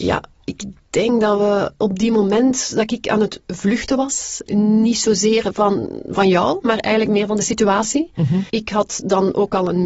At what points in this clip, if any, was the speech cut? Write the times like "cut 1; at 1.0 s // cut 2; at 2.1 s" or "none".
cut 1; at 4.5 s // cut 2; at 8.5 s